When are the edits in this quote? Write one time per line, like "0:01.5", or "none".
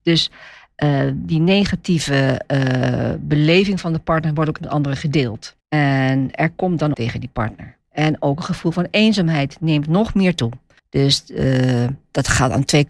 0:04.6
0:05.6
0:06.9
0:07.8
0:10.8